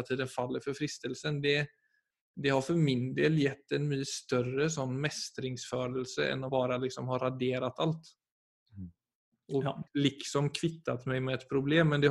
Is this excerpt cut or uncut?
cut